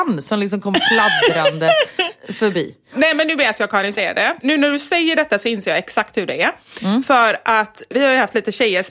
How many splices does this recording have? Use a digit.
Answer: 1